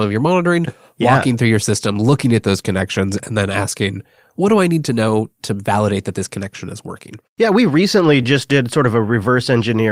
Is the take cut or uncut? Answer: uncut